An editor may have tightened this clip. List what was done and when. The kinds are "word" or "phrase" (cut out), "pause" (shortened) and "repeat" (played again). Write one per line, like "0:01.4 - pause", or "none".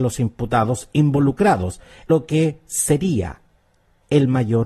0:02.1 - word

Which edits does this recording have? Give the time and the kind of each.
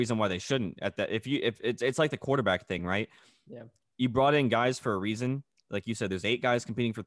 none

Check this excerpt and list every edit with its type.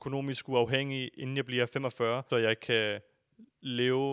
0:02.3 - word

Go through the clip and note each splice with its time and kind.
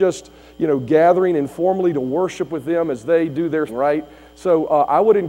0:03.7 - word

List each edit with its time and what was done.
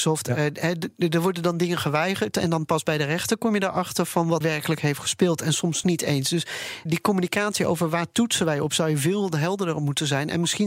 0:04.4 - word
0:05.8 - word
0:06.9 - word

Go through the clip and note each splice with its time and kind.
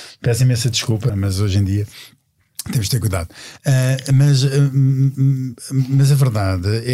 0:01.1 - word

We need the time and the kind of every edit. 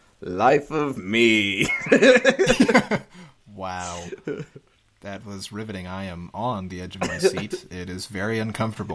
none

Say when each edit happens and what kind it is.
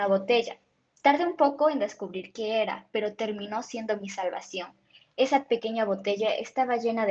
none

